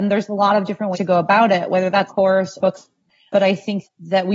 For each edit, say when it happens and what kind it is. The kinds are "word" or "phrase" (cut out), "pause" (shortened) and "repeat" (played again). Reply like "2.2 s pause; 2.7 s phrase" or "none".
0.9 s word; 2.1 s phrase; 2.6 s phrase